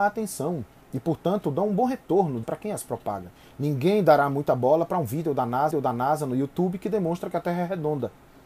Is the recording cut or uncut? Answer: cut